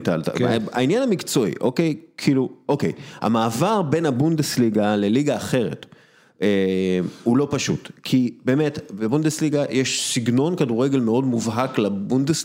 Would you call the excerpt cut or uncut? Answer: uncut